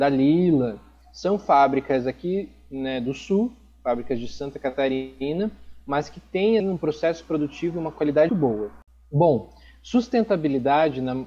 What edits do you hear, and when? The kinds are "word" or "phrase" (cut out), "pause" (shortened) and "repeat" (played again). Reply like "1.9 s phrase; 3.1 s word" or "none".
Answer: 6.6 s word; 8.3 s word